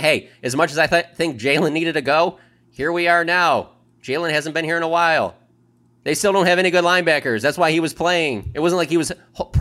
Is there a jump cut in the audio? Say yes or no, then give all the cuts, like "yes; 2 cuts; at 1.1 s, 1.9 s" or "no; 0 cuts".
no; 0 cuts